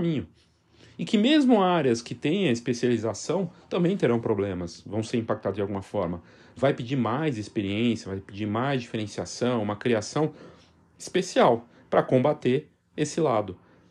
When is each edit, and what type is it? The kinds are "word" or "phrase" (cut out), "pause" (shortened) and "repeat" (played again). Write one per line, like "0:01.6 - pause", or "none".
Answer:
none